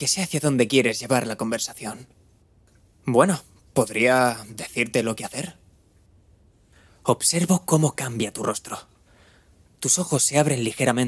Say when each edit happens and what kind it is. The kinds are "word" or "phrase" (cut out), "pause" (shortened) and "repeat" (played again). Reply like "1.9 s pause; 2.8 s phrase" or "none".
none